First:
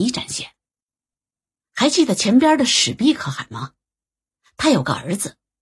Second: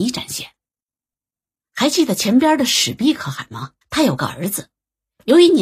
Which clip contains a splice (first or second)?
second